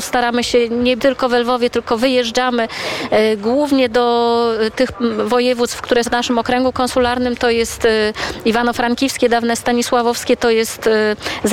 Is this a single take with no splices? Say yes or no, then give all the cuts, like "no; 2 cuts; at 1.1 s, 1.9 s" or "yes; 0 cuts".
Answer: no; 2 cuts; at 1.0 s, 6.0 s